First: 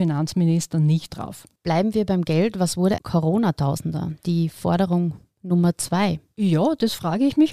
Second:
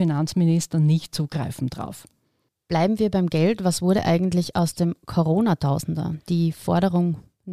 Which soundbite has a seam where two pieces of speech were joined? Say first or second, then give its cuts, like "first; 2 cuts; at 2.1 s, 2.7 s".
first; 3 cuts; at 1.1 s, 1.6 s, 3.0 s